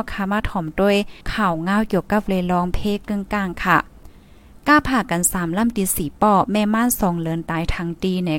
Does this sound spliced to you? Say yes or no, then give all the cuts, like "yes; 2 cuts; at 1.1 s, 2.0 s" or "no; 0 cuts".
yes; 1 cut; at 1.2 s